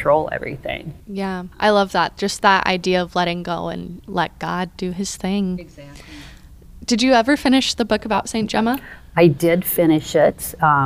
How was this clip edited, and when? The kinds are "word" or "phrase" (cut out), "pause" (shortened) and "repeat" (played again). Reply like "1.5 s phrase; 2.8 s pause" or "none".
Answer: 1.5 s pause

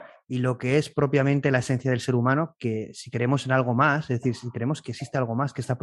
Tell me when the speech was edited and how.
none

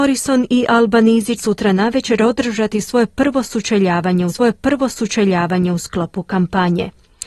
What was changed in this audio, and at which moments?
1.4 s word; 4.3 s repeat

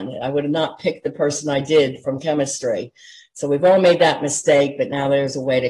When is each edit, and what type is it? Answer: none

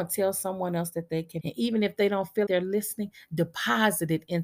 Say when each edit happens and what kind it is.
1.4 s phrase; 2.5 s word

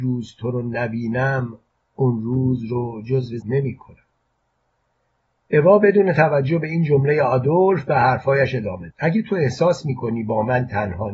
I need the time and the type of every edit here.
3.4 s phrase; 8.9 s word

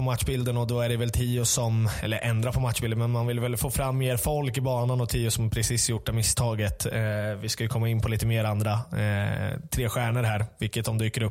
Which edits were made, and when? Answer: none

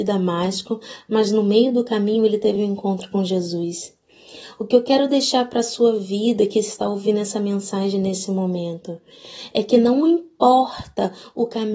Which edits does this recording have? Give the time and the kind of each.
none

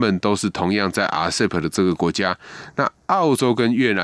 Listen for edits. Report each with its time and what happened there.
none

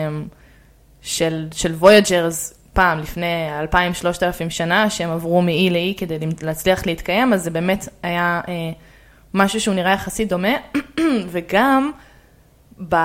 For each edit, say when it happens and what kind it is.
none

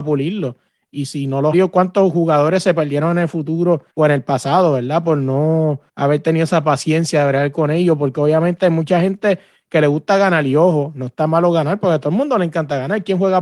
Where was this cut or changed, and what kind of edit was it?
1.5 s phrase; 3.9 s pause; 5.9 s pause

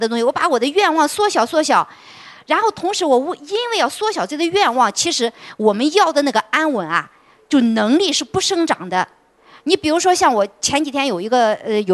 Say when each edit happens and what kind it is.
none

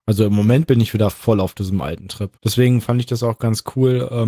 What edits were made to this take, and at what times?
2.3 s pause

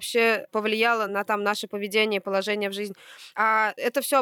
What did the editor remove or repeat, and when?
none

